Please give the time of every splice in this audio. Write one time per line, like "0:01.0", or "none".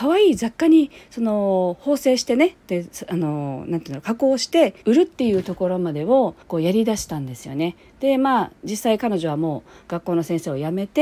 0:04.8
0:06.4